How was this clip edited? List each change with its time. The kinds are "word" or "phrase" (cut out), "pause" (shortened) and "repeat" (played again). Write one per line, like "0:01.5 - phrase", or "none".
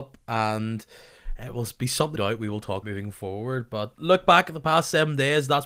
0:02.2 - word
0:02.8 - word
0:03.9 - word

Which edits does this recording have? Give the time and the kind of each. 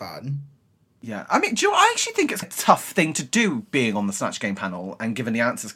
0:02.4 - word

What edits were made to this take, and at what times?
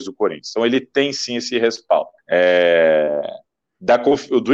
0:02.2 - pause

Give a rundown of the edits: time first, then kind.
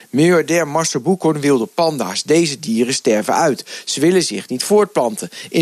none

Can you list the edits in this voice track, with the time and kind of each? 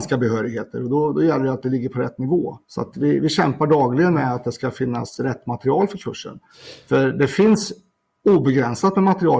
0:02.6 - pause

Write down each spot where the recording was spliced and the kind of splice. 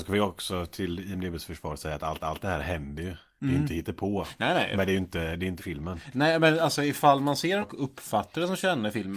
0:02.2 - repeat
0:05.6 - word
0:07.6 - word

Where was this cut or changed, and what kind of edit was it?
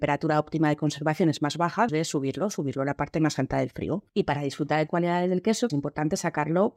0:01.9 - word
0:04.1 - pause
0:04.9 - phrase
0:05.7 - word

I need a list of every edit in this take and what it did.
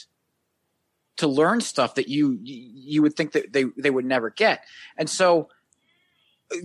none

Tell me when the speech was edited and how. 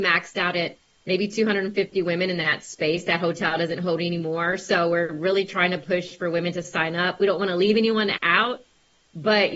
none

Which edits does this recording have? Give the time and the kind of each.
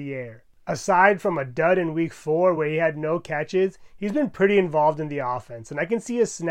none

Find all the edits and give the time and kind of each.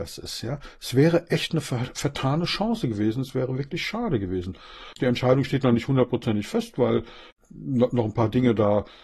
none

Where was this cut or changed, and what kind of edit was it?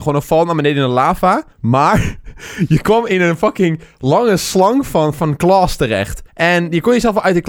0:01.5 - pause
0:06.3 - pause

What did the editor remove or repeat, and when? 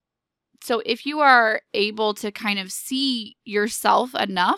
none

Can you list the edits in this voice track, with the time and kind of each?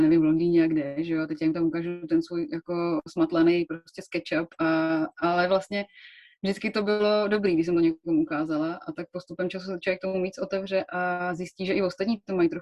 0:03.1 - word

